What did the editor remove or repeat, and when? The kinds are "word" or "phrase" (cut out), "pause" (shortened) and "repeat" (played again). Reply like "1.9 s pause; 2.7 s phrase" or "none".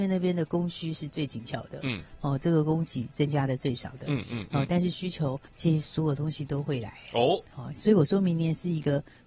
5.5 s pause